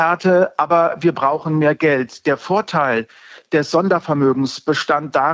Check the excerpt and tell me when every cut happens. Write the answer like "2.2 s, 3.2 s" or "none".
none